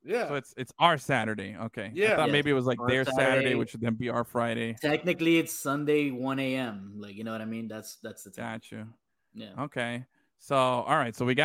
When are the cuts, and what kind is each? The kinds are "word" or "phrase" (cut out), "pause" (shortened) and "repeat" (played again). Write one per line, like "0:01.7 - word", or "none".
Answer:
none